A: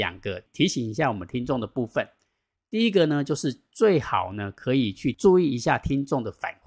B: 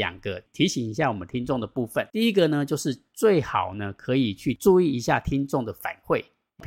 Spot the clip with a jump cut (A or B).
B